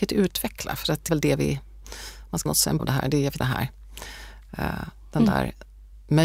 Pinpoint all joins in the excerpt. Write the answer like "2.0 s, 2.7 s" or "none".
1.1 s, 2.5 s, 2.8 s, 3.4 s